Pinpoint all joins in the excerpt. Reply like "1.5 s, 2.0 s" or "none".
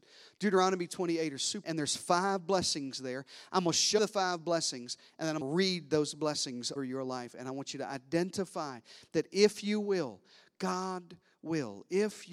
1.6 s, 4.0 s, 5.4 s, 6.8 s